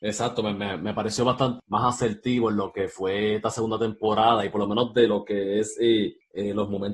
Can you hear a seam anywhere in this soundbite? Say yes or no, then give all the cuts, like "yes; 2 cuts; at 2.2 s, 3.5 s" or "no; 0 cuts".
yes; 1 cut; at 1.6 s